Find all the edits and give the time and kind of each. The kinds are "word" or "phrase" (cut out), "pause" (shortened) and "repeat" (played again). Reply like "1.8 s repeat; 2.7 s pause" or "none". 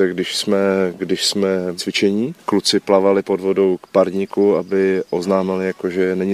1.8 s word